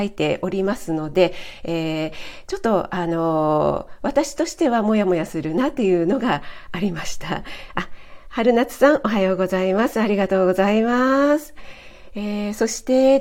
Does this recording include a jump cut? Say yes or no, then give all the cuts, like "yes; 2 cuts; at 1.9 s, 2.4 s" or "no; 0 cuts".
no; 0 cuts